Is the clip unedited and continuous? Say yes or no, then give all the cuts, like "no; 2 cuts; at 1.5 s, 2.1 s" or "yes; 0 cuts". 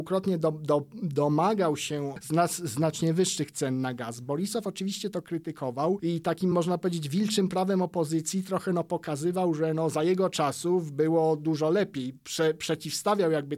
yes; 0 cuts